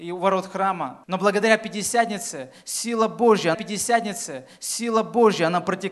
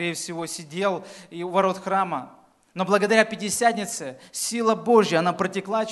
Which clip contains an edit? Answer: first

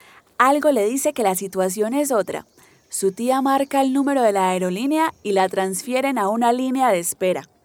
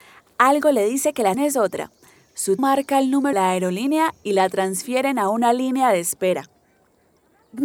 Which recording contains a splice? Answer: second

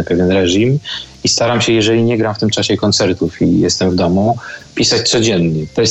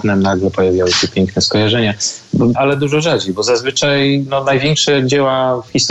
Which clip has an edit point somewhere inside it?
second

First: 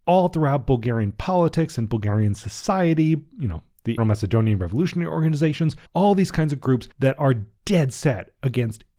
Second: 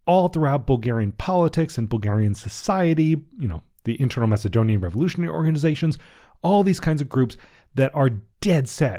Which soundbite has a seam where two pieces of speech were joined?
first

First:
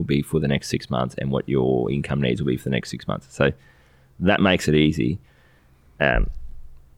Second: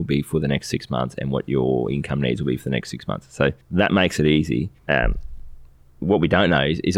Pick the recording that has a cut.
second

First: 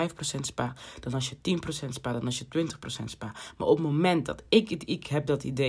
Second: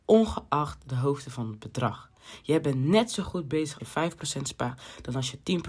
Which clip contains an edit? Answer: second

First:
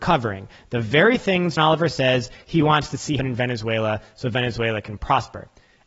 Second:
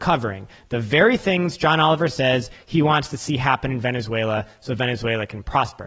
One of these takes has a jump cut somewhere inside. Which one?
first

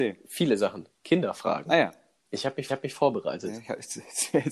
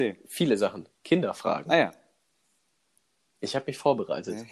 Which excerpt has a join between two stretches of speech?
first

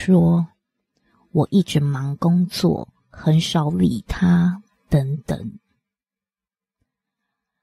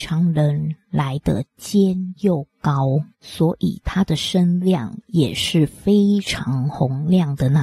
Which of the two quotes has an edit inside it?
second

